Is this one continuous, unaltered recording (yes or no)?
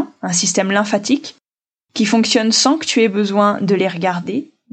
yes